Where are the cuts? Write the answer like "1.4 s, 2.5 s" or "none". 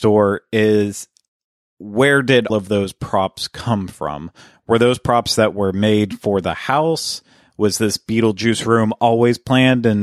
2.5 s